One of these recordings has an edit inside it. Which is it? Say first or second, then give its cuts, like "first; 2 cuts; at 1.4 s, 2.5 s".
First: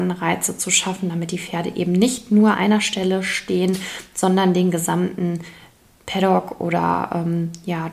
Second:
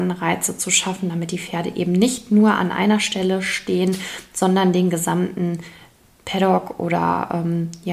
first; 1 cut; at 2.5 s